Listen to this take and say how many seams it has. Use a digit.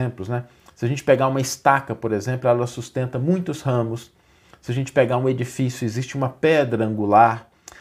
0